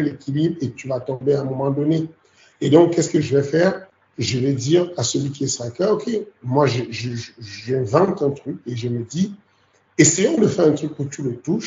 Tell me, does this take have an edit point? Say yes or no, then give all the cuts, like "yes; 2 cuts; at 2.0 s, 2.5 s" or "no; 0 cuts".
no; 0 cuts